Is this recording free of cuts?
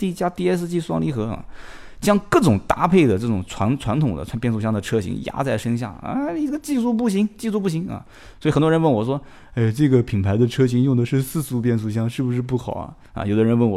yes; 0 cuts

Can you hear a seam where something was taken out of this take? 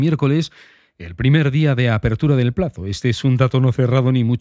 no; 0 cuts

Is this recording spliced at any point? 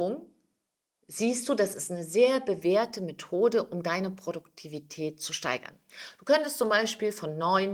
no; 0 cuts

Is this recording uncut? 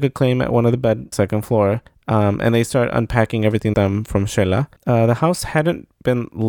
no; 4 cuts; at 1.1 s, 1.9 s, 3.7 s, 4.8 s

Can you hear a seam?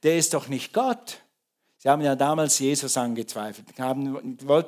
no; 0 cuts

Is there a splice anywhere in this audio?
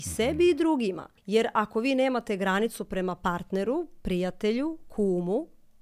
yes; 1 cut; at 1.2 s

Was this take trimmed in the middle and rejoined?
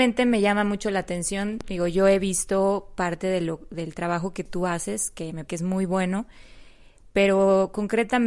yes; 1 cut; at 5.5 s

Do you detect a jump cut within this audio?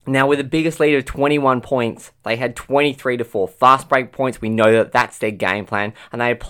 no; 0 cuts

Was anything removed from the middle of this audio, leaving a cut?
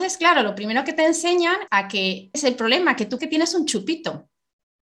yes; 3 cuts; at 1.7 s, 2.3 s, 3.2 s

